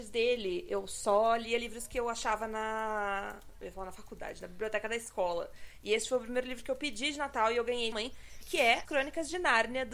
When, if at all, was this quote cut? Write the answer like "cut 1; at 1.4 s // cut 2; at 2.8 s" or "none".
cut 1; at 7.9 s // cut 2; at 8.9 s